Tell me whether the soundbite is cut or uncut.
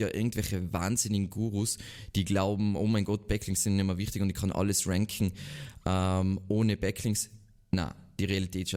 uncut